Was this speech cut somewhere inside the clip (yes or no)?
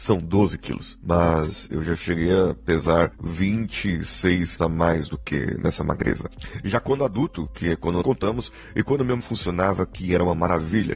yes